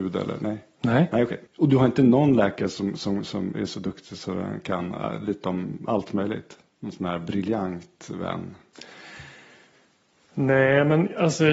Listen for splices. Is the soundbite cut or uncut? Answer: cut